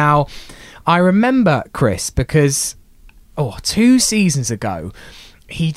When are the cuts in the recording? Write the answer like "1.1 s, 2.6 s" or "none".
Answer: none